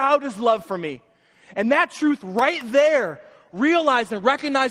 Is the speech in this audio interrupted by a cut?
no; 0 cuts

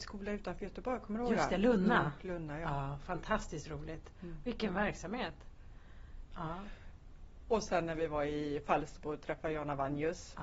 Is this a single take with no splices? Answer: yes; 0 cuts

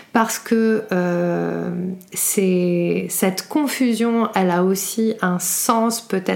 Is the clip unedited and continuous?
yes; 0 cuts

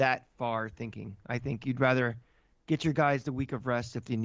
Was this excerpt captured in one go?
yes; 0 cuts

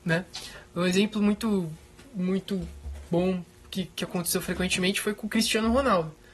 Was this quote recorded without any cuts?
yes; 0 cuts

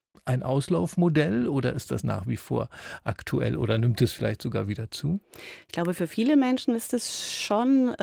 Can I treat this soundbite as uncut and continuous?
yes; 0 cuts

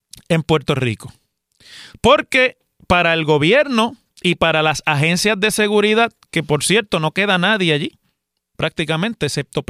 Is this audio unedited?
yes; 0 cuts

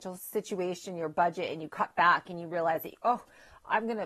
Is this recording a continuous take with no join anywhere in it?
yes; 0 cuts

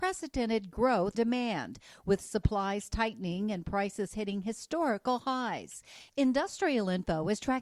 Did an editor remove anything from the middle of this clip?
yes; 2 cuts; at 1.1 s, 4.1 s

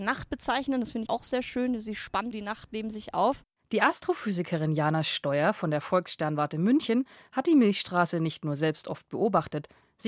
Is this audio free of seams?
no; 2 cuts; at 1.1 s, 2.3 s

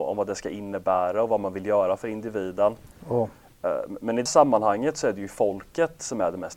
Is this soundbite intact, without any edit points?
no; 1 cut; at 4.3 s

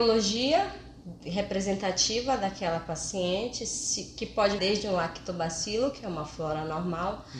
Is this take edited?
yes; 1 cut; at 4.6 s

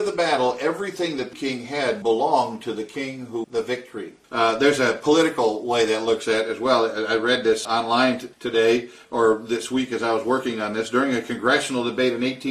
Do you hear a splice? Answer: yes; 6 cuts; at 1.3 s, 2.0 s, 3.4 s, 4.2 s, 7.6 s, 8.3 s

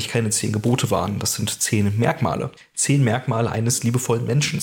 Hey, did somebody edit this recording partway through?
yes; 1 cut; at 2.6 s

